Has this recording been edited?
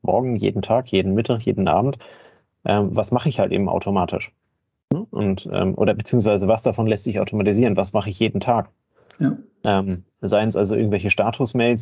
no; 0 cuts

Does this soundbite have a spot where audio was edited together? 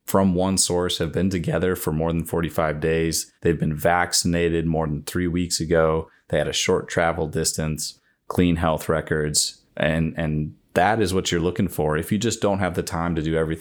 yes; 2 cuts; at 3.4 s, 9.7 s

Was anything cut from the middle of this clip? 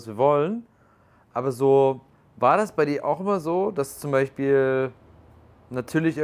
no; 0 cuts

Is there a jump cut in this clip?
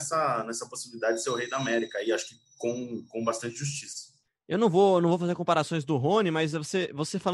yes; 1 cut; at 4.3 s

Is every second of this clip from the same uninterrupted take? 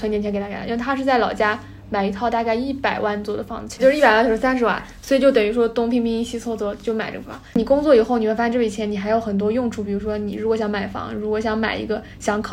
no; 1 cut; at 3.8 s

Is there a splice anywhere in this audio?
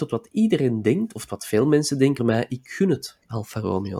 yes; 1 cut; at 2.2 s

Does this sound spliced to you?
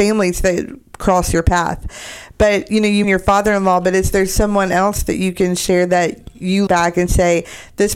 yes; 2 cuts; at 3.0 s, 6.7 s

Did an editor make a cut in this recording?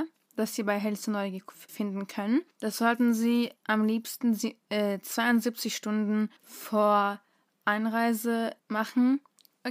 yes; 5 cuts; at 1.7 s, 2.5 s, 3.6 s, 6.4 s, 8.6 s

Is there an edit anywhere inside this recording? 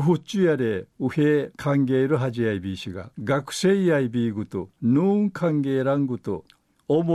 yes; 4 cuts; at 0.9 s, 1.5 s, 3.1 s, 4.7 s

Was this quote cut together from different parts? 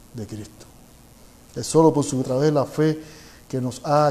yes; 2 cuts; at 1.2 s, 2.2 s

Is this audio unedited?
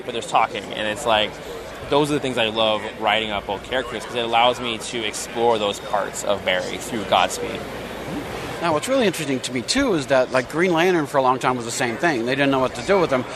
yes; 0 cuts

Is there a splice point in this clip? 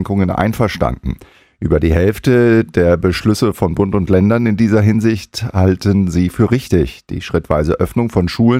no; 0 cuts

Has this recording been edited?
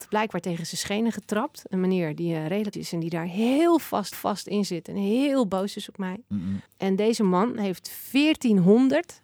yes; 3 cuts; at 2.7 s, 4.1 s, 6.7 s

